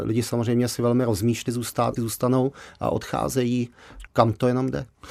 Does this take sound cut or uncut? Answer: cut